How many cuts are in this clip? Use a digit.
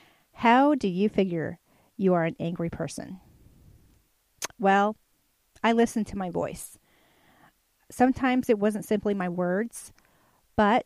0